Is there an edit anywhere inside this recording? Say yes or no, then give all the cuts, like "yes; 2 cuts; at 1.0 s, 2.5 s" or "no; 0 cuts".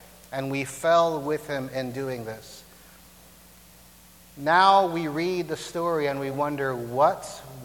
no; 0 cuts